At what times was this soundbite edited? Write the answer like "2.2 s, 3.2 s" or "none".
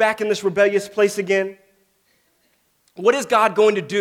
none

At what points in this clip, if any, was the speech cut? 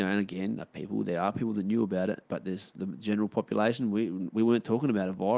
2.3 s

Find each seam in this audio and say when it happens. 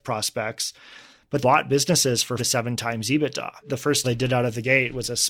1.4 s, 2.4 s, 4.0 s

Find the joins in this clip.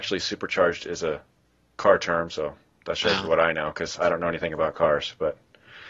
none

